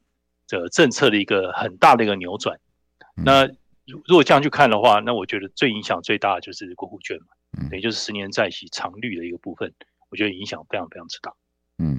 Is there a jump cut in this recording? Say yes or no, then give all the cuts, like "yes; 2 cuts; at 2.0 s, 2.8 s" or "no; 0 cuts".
no; 0 cuts